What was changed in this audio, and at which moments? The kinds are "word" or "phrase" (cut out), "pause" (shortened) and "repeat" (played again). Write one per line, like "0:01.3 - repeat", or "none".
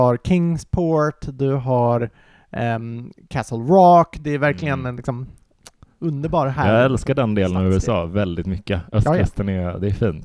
none